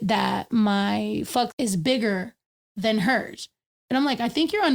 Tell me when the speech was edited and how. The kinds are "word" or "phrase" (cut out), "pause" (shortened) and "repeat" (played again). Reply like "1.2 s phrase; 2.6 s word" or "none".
1.5 s word